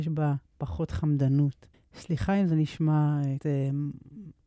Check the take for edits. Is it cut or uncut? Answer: cut